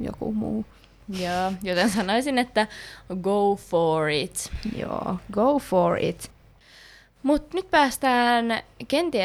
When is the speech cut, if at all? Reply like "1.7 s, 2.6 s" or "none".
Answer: none